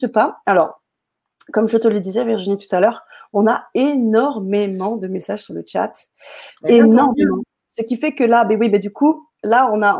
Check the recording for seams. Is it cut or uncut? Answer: uncut